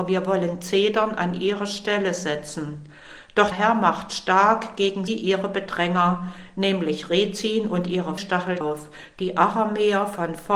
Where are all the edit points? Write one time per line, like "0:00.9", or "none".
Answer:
0:03.5
0:05.1
0:08.2
0:08.6